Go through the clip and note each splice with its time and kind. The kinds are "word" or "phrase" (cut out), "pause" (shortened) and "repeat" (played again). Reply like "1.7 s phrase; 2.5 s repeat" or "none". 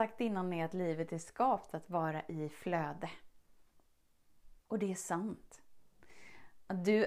4.6 s pause